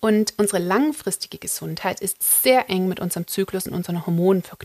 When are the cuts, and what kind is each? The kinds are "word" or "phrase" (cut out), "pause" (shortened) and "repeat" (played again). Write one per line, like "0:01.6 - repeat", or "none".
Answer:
none